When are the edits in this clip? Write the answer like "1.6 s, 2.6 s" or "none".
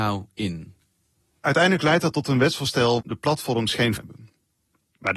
3.0 s, 4.0 s